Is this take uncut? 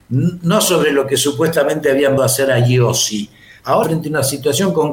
no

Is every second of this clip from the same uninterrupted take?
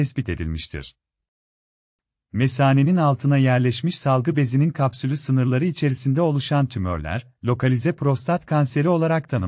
yes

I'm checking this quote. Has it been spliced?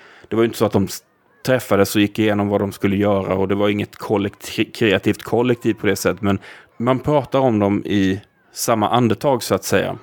no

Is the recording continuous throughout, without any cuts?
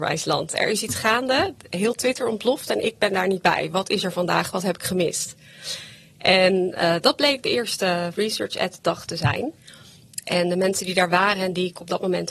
yes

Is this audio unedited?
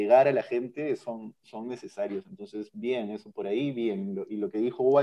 yes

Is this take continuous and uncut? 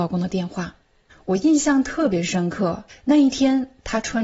no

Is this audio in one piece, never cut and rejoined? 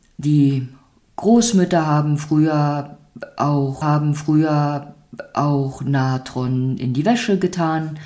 no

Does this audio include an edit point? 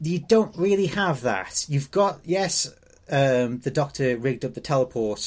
no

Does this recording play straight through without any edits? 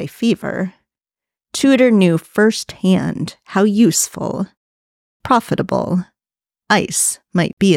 no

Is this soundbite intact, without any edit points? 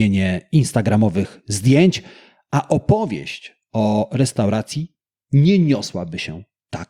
yes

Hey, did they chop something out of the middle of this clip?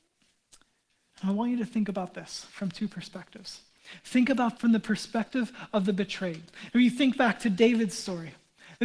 yes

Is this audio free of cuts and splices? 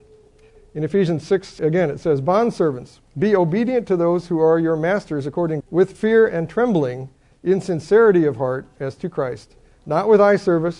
no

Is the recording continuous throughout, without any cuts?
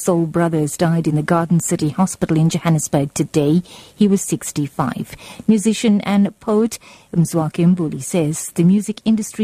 yes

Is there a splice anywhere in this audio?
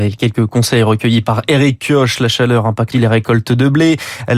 yes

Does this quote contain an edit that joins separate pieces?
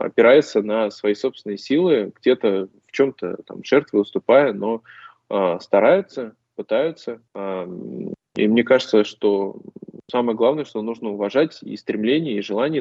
yes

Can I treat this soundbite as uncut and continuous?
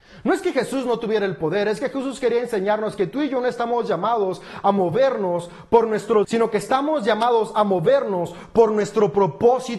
no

